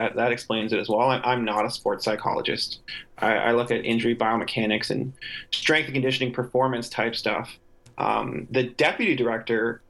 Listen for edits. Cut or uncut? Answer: uncut